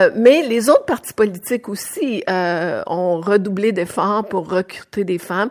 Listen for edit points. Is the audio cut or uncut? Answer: uncut